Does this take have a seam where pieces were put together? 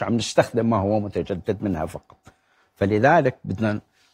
no; 0 cuts

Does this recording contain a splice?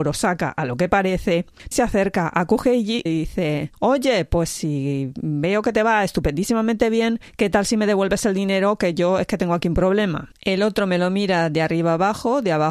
yes; 3 cuts; at 1.7 s, 3.1 s, 3.7 s

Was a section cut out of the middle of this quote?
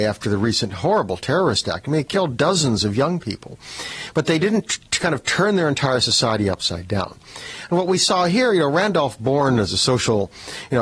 no; 0 cuts

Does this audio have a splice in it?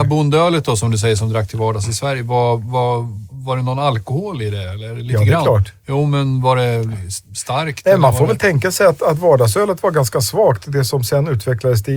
no; 0 cuts

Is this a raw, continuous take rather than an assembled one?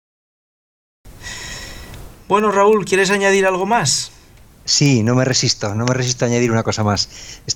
yes; 0 cuts

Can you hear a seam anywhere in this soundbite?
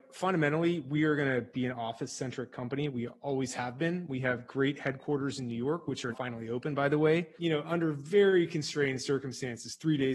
yes; 1 cut; at 6.1 s

